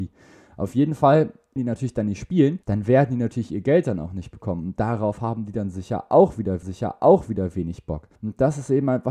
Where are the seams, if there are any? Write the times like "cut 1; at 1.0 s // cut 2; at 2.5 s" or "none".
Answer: cut 1; at 1.6 s // cut 2; at 2.6 s // cut 3; at 6.6 s // cut 4; at 8.2 s